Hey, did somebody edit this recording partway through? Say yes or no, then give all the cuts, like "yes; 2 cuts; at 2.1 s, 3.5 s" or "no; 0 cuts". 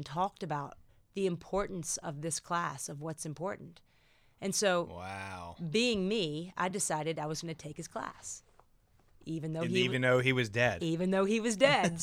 no; 0 cuts